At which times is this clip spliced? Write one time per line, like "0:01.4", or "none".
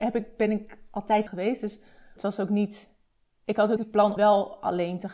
0:01.3
0:02.2
0:03.2
0:03.8
0:04.2